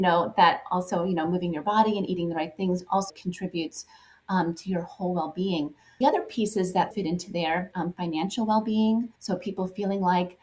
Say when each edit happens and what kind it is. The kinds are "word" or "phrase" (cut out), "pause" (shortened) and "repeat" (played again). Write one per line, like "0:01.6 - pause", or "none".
0:03.1 - word
0:06.0 - phrase
0:06.9 - word
0:07.7 - phrase
0:09.2 - pause

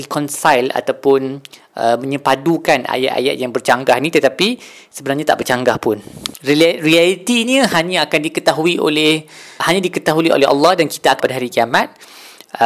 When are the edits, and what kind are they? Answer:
0:09.6 - word
0:11.2 - word

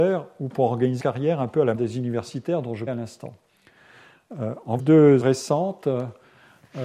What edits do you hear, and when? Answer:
0:01.0 - word
0:01.7 - word
0:02.9 - word
0:04.8 - word
0:05.2 - word

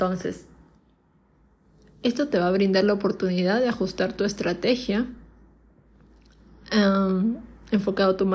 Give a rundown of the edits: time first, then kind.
none

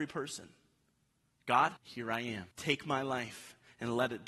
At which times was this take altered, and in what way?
0:01.8 - pause
0:02.5 - pause

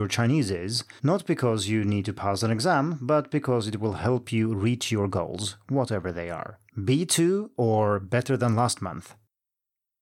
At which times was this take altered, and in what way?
0:01.0 - pause
0:06.7 - pause

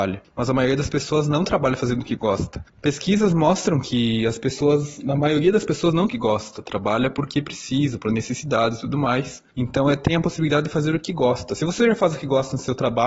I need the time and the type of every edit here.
0:06.1 - phrase

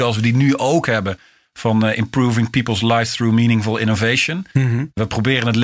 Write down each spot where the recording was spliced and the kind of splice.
none

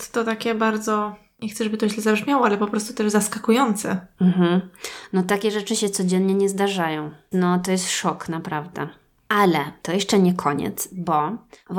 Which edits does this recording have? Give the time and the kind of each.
0:07.3 - word

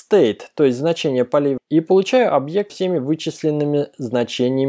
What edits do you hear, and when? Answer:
0:01.6 - word
0:02.7 - word

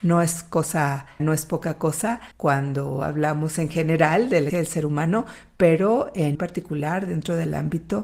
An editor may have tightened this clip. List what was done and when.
0:01.2 - word
0:02.3 - pause
0:04.5 - word
0:06.3 - word

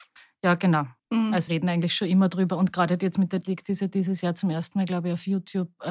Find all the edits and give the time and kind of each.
0:01.0 - pause
0:01.5 - word
0:03.4 - word

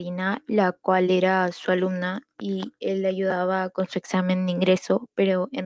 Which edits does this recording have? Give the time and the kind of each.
none

